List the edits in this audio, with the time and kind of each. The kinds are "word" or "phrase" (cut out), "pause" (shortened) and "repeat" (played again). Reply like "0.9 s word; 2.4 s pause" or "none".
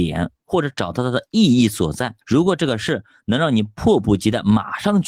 2.2 s pause